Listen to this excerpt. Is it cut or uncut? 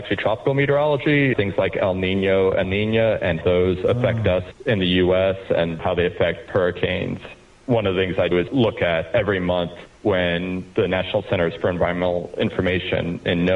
cut